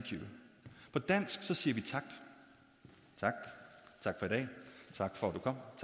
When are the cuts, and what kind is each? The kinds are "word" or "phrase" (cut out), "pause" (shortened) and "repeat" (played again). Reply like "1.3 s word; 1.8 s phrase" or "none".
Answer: none